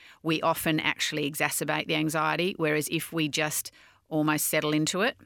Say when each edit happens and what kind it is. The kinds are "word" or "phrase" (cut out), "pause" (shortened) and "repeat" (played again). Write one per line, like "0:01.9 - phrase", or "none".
none